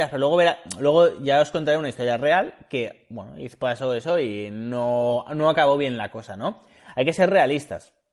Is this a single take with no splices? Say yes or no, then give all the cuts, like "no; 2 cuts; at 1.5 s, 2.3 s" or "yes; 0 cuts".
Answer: yes; 0 cuts